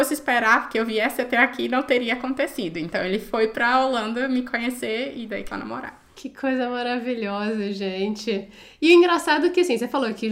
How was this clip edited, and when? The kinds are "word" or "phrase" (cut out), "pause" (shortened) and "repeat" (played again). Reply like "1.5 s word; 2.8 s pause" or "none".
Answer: 5.5 s phrase

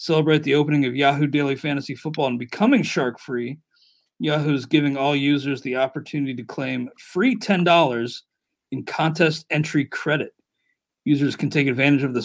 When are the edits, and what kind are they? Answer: none

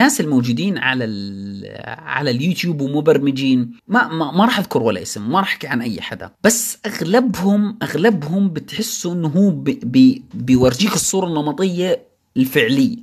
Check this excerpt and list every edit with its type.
3.8 s pause; 6.3 s pause

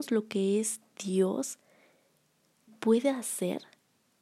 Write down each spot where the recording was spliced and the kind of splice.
2.7 s word

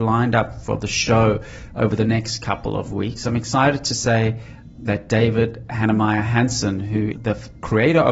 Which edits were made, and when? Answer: 4.8 s word; 7.1 s word

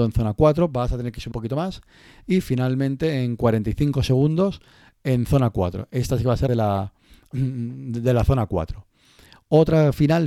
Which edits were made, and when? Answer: 1.3 s word; 6.5 s phrase

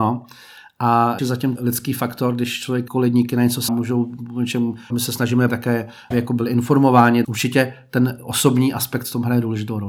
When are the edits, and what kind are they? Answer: 1.2 s word; 1.6 s word; 2.9 s word; 3.7 s word; 4.9 s word; 5.5 s word; 6.1 s word; 7.2 s word

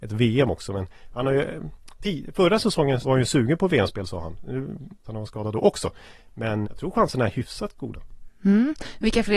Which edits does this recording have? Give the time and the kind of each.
3.0 s word; 5.0 s word; 6.6 s word

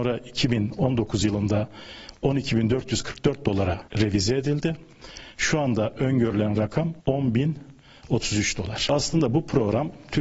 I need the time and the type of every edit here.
3.9 s pause; 7.0 s pause

